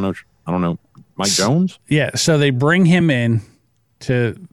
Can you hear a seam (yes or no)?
no